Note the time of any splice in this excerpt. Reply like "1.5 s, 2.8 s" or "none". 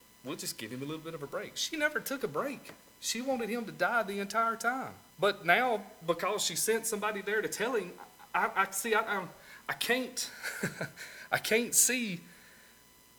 5.1 s